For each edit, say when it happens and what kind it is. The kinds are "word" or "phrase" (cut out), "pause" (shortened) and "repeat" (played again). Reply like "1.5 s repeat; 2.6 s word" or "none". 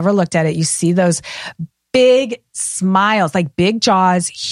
none

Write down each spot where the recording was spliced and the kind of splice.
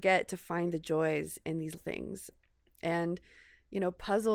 1.8 s word

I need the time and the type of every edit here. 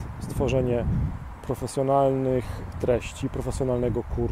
2.7 s word

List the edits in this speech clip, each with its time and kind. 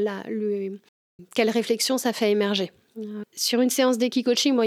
3.2 s word

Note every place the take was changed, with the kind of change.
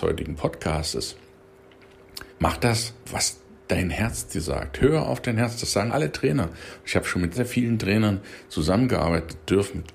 2.3 s pause; 3.0 s pause; 5.9 s word; 7.3 s word

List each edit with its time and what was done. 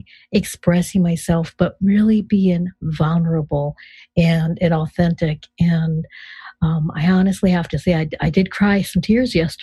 none

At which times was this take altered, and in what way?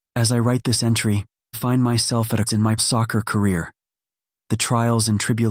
1.5 s word; 2.5 s word; 2.8 s word

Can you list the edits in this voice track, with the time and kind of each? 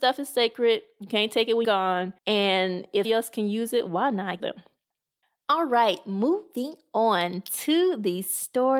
1.6 s word; 2.2 s pause; 3.0 s word; 4.4 s phrase

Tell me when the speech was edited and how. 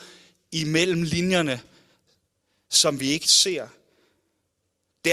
3.2 s word

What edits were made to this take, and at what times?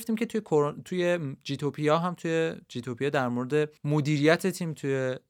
3.8 s pause

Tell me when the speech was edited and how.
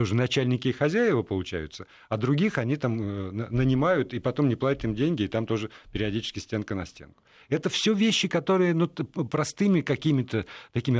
none

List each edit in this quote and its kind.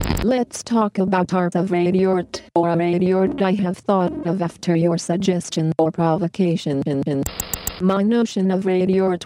1.5 s word

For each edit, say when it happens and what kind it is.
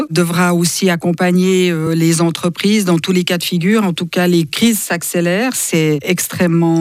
none

